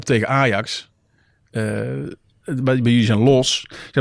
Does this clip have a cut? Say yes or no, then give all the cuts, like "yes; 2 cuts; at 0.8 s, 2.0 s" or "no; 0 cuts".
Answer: no; 0 cuts